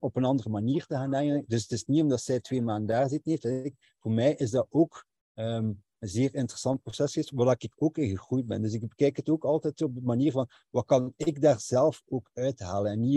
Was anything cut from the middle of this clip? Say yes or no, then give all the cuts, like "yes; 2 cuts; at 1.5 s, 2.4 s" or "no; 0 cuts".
no; 0 cuts